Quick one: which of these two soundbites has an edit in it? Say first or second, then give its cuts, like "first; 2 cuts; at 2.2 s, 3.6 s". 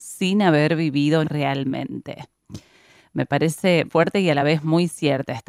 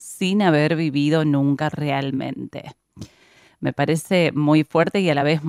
first; 2 cuts; at 1.2 s, 3.9 s